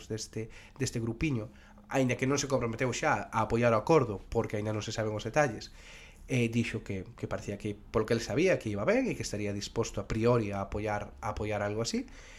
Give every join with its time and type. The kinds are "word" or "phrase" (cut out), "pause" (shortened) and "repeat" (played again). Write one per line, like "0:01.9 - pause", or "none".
none